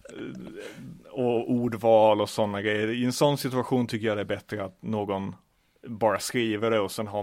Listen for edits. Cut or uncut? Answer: uncut